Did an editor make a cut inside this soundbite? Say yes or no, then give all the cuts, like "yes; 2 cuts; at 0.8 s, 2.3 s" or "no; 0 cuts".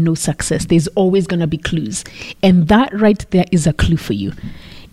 no; 0 cuts